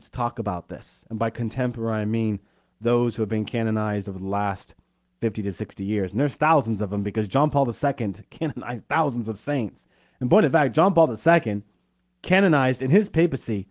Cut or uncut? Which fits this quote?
uncut